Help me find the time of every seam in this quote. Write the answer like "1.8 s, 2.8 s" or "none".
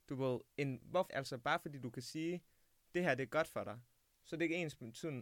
1.1 s